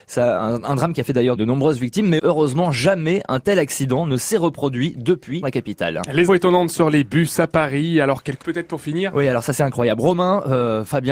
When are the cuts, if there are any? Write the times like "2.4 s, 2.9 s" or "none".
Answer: 1.4 s, 2.2 s, 5.4 s, 6.3 s, 8.4 s, 9.6 s